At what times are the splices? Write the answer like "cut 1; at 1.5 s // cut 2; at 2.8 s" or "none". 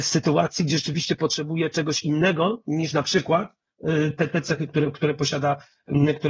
none